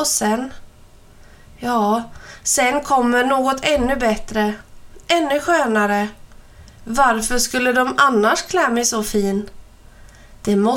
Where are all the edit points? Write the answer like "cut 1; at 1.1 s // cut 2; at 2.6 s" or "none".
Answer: none